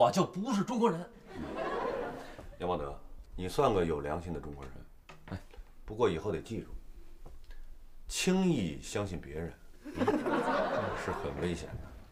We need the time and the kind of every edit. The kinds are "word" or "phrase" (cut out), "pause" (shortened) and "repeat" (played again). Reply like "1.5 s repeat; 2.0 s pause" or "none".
3.3 s word